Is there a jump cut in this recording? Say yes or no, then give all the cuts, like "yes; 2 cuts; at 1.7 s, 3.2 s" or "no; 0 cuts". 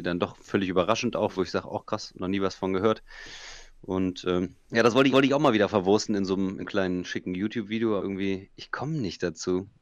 yes; 5 cuts; at 1.4 s, 4.6 s, 5.1 s, 6.6 s, 8.0 s